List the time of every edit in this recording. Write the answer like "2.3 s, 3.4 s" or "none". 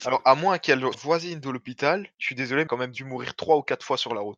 0.9 s, 2.1 s, 2.7 s